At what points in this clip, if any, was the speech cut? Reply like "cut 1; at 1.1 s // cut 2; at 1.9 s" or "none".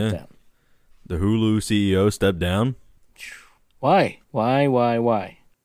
cut 1; at 4.2 s